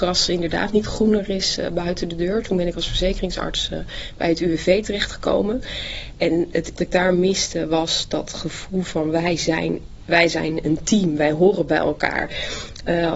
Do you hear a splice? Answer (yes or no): yes